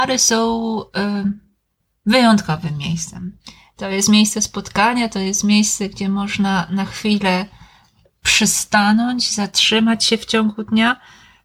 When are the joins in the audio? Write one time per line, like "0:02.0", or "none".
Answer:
none